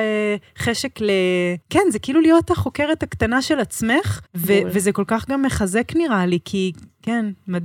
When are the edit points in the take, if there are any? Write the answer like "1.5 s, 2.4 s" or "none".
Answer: 1.6 s, 4.3 s